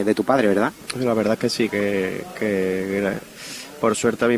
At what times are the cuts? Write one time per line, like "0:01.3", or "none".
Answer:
none